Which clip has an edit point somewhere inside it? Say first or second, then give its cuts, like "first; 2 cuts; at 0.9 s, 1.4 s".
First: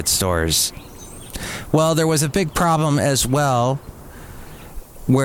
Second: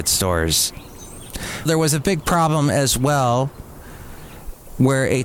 second; 1 cut; at 1.7 s